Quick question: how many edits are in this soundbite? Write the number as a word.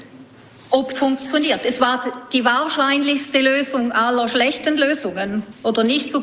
one